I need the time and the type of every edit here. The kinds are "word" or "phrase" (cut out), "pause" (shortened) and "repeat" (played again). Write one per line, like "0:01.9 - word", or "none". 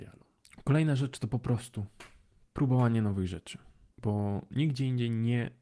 none

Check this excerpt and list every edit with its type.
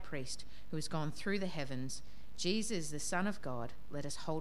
none

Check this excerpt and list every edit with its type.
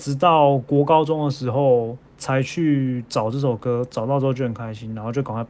0:02.1 - pause

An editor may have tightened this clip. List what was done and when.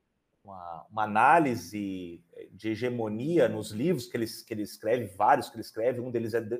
none

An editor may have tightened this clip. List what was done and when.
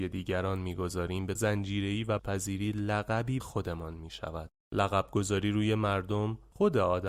0:01.4 - word
0:02.2 - word
0:03.4 - word

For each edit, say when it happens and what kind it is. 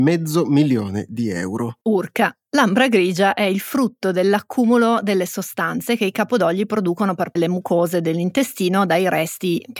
0:01.8 - pause
0:07.4 - word

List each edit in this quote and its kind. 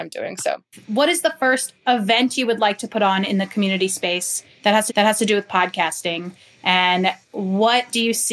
0:04.9 - repeat

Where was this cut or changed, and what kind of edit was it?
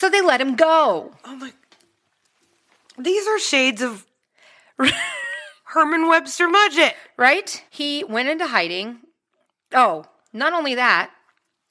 0:07.7 - pause

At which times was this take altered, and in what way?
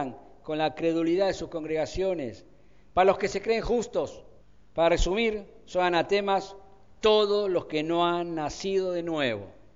0:04.4 - pause

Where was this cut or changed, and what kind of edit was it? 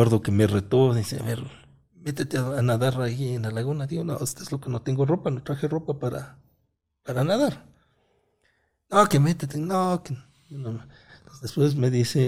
none

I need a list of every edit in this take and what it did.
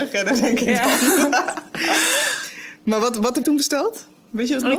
0:03.4 - word

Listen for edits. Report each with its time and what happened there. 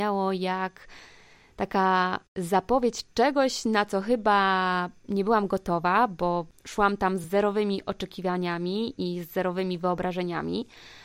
none

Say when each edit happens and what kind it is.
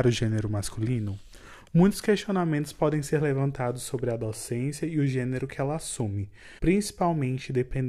0:06.6 - pause

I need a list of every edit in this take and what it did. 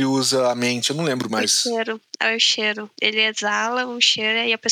none

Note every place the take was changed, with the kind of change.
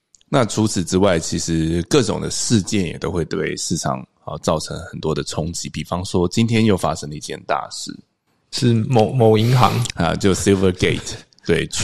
none

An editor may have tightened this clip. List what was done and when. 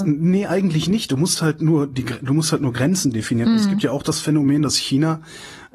none

